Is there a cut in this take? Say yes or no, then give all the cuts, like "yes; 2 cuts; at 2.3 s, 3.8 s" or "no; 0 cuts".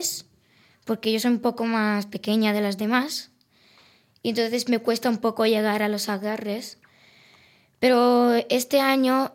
no; 0 cuts